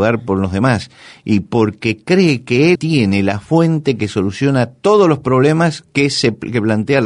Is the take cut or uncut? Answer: cut